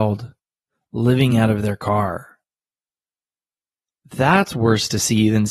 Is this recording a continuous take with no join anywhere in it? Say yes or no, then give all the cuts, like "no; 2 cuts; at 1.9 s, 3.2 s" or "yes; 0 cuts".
yes; 0 cuts